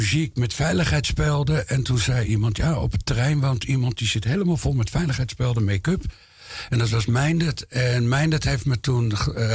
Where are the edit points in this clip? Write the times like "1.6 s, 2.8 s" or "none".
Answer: none